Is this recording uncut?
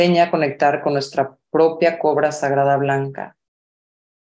yes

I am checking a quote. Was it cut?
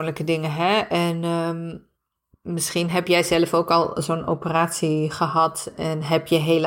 no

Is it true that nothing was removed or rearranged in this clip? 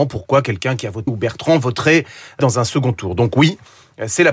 no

